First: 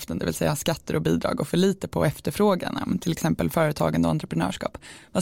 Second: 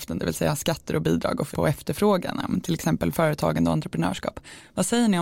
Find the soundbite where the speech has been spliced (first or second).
second